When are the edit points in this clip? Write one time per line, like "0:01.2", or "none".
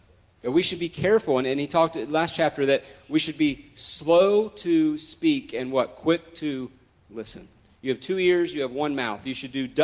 none